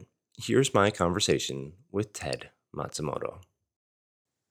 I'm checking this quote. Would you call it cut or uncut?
uncut